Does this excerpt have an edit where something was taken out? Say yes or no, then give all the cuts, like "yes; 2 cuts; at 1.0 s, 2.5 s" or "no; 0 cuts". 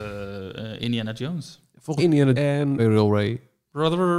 yes; 3 cuts; at 2.0 s, 2.3 s, 2.8 s